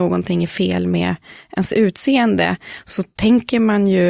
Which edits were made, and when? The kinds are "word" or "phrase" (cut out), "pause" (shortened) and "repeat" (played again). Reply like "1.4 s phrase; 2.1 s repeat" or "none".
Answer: none